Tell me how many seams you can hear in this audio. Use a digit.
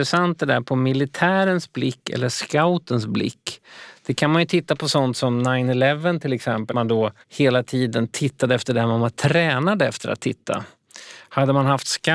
2